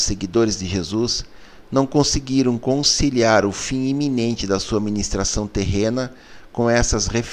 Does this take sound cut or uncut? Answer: uncut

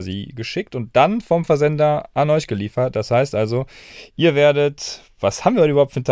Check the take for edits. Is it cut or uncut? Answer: uncut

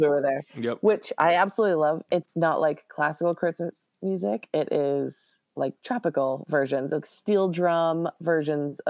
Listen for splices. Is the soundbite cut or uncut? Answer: cut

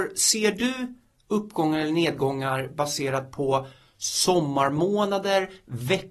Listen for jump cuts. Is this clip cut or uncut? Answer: uncut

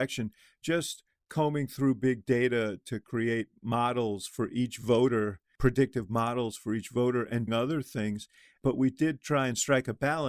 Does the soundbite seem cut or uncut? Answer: cut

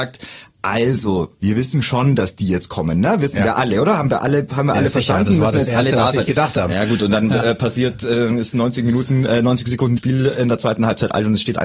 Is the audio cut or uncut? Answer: cut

